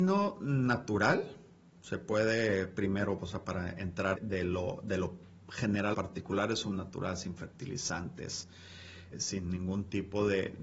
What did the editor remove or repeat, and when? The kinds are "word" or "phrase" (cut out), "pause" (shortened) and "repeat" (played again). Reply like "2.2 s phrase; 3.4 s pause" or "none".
4.2 s word; 5.9 s word; 6.7 s word; 9.1 s word